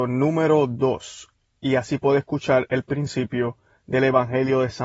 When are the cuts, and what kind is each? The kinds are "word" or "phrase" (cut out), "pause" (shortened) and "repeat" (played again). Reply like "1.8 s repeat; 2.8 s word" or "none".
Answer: none

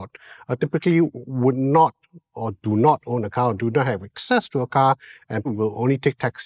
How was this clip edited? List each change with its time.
5.5 s word

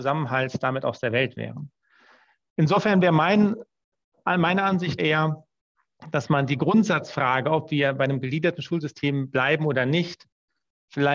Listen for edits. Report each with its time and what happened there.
5.0 s word

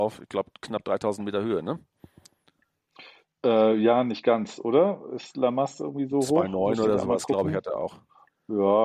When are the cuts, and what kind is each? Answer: none

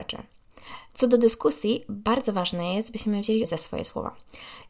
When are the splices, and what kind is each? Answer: 3.4 s word

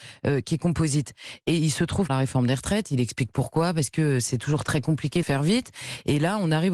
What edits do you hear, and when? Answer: 2.1 s phrase; 5.2 s phrase

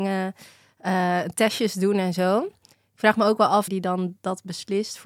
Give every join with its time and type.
3.7 s phrase

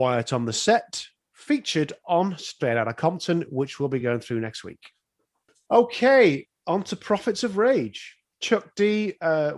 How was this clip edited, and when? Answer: none

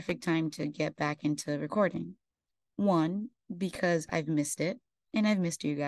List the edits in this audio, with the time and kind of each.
2.3 s pause

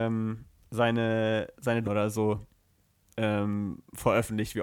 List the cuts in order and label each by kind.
1.8 s word

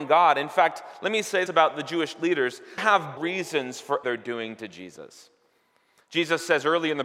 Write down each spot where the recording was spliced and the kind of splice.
1.5 s word; 2.8 s word; 3.2 s word; 4.0 s word

